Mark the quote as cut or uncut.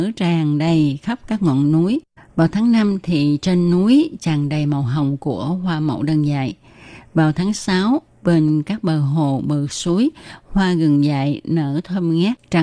uncut